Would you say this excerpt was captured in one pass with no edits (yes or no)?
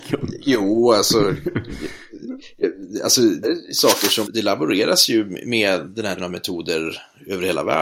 no